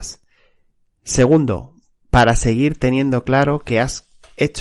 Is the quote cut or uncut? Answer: uncut